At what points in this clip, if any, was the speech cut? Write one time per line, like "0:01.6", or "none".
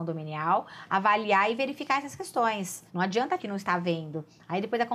0:02.9
0:03.4